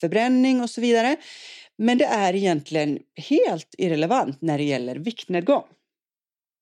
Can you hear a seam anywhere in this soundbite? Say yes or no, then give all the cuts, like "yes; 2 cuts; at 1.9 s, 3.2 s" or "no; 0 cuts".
no; 0 cuts